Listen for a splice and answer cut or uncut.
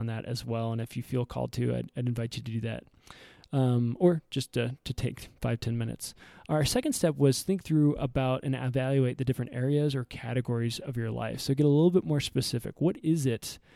uncut